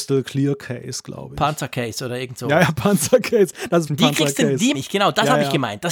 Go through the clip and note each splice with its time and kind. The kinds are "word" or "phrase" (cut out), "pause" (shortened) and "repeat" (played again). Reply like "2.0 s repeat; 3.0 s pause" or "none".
3.9 s word; 4.7 s word